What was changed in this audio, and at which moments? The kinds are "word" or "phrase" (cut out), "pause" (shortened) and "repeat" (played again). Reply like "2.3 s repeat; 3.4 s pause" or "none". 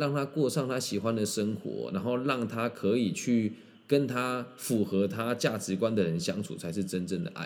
none